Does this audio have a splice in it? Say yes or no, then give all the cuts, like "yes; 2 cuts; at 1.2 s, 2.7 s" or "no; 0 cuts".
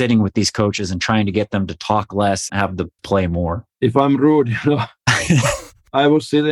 yes; 2 cuts; at 2.5 s, 3.0 s